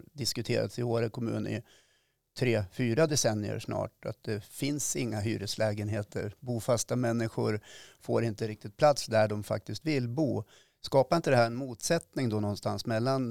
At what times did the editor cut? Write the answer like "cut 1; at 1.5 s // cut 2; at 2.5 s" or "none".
none